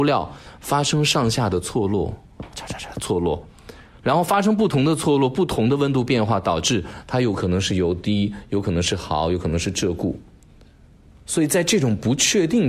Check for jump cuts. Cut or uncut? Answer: uncut